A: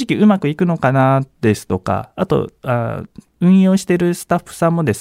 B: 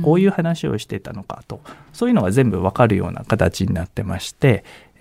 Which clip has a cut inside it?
A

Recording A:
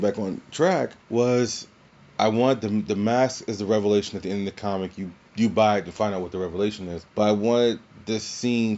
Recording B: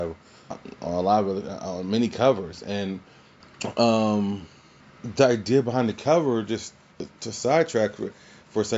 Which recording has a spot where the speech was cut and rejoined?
A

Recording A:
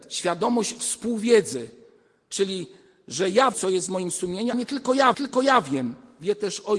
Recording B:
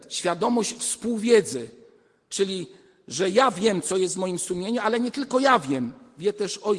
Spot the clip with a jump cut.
A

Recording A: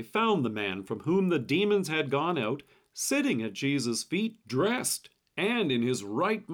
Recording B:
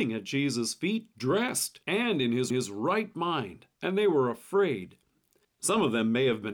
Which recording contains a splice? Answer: B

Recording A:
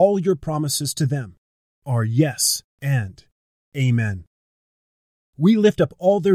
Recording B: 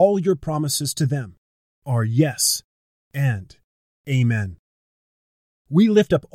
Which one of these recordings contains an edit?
A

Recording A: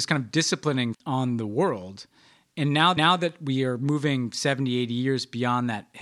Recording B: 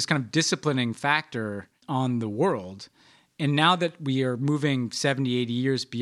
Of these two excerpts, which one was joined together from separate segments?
A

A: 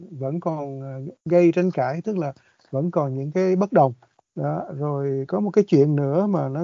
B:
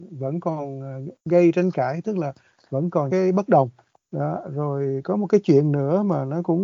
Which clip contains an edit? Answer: B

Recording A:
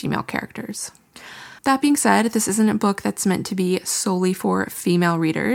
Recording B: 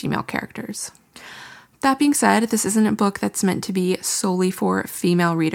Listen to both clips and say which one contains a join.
A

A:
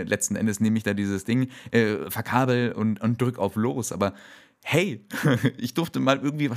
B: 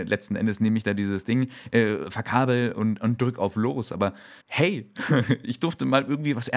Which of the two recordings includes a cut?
B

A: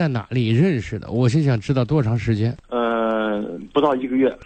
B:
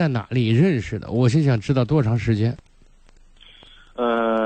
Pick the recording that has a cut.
A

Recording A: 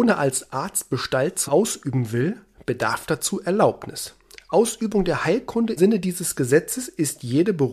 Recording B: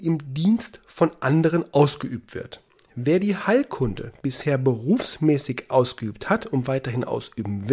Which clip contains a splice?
A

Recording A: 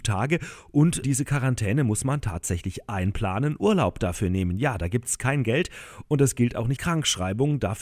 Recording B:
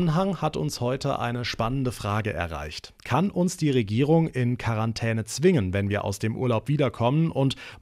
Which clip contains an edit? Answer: A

